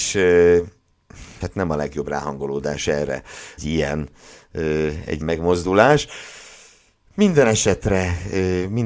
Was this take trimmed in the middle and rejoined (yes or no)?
yes